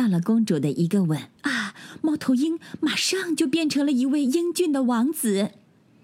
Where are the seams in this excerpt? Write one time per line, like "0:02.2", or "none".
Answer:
0:01.4